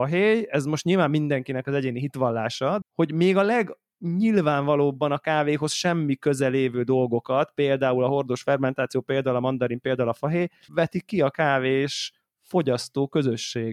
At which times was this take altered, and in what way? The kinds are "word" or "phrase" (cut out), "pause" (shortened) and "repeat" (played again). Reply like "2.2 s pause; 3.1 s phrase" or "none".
2.8 s word; 10.7 s phrase